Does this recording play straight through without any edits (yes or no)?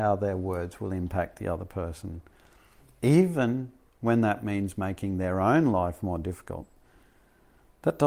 yes